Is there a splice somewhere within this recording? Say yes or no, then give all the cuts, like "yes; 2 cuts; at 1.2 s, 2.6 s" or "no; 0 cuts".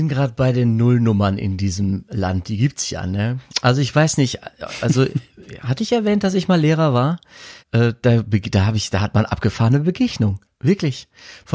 yes; 1 cut; at 7.6 s